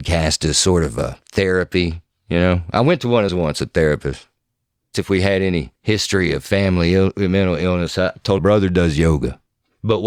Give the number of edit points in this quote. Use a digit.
5